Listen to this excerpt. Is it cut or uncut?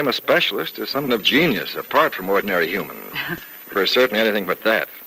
cut